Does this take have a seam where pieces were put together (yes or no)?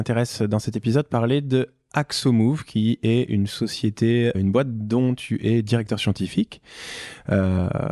yes